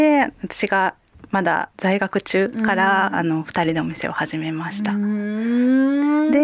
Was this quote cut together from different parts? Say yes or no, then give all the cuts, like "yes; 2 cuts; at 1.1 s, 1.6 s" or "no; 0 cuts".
yes; 1 cut; at 1.7 s